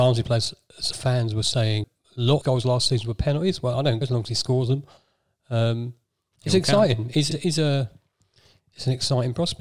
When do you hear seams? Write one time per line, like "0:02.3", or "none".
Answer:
0:00.9
0:01.8
0:02.4
0:04.0
0:07.3